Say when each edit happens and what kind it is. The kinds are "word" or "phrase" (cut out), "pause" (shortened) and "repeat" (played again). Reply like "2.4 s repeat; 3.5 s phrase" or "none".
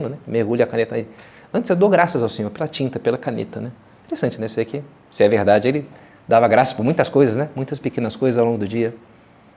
none